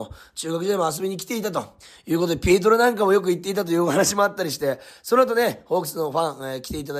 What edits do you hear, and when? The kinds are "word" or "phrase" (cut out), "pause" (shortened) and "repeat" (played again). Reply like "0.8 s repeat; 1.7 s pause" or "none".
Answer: none